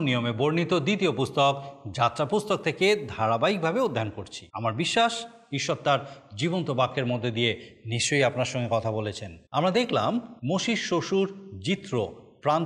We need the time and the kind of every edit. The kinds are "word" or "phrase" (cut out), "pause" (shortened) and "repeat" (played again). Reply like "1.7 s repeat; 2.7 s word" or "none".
4.5 s pause; 9.5 s pause; 10.4 s pause

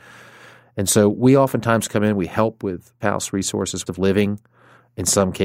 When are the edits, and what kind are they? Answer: 3.0 s word; 3.9 s phrase

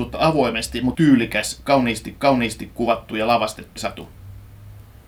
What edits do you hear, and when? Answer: 0.9 s phrase; 2.2 s repeat; 3.8 s word

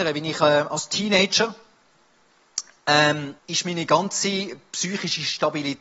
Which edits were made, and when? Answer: 3.4 s pause

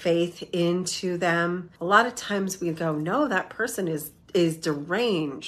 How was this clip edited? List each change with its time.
1.8 s pause; 4.2 s pause

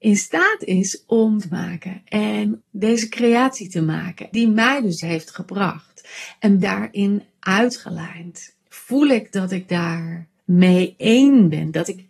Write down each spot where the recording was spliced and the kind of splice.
1.4 s word; 2.6 s word; 4.3 s word; 5.0 s word; 6.6 s phrase; 8.6 s pause; 10.4 s pause

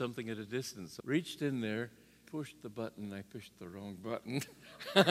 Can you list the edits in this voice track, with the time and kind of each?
1.0 s word; 2.2 s word

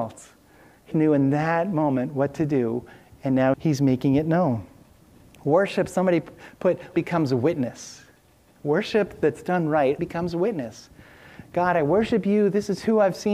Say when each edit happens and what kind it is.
0.9 s word; 3.5 s word; 6.9 s word; 10.0 s word

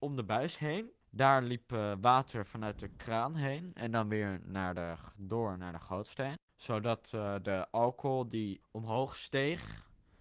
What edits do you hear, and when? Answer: 1.0 s pause

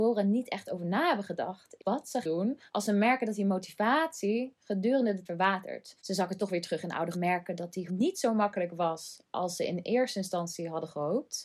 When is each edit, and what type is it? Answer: 1.8 s word; 2.2 s word; 2.7 s pause; 5.3 s word; 6.0 s pause; 7.1 s phrase; 7.9 s word

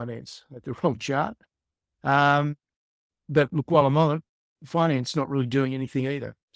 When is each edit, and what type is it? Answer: none

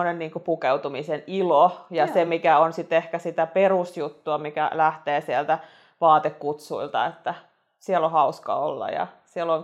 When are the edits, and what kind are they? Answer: none

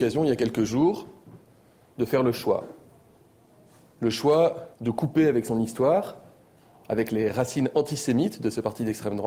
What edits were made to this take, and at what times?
4.7 s pause

